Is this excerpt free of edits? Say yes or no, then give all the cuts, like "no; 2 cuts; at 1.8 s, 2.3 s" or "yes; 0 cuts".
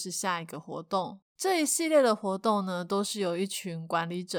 no; 1 cut; at 1.3 s